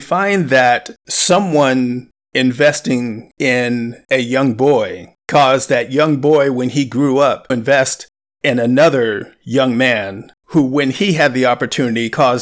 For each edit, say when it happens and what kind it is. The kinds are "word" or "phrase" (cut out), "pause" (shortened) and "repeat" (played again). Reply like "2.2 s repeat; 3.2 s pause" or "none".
5.2 s pause; 7.5 s word; 10.4 s pause